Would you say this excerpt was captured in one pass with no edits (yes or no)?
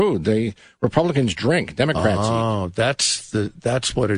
yes